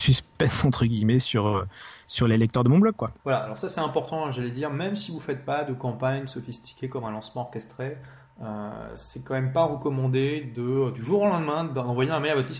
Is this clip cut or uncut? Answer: cut